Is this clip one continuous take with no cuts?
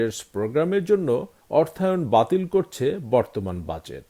yes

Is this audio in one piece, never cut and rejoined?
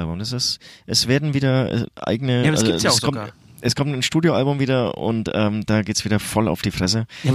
yes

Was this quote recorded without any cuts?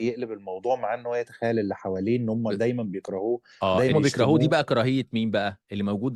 no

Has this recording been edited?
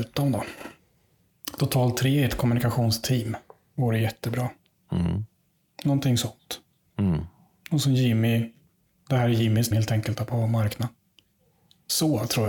yes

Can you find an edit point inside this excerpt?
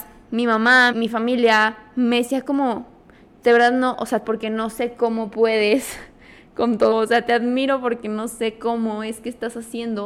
yes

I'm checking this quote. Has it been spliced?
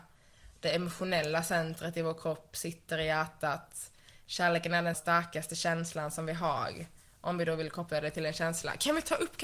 yes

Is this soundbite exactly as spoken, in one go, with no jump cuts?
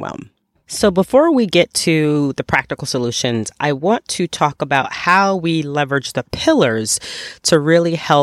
yes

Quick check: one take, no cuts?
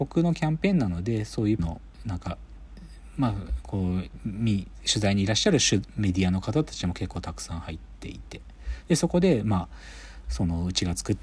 no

